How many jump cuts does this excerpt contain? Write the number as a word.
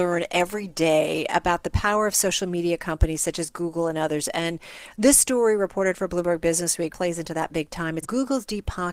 two